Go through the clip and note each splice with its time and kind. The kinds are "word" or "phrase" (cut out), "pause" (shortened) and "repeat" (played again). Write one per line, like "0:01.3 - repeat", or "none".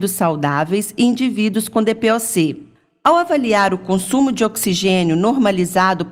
none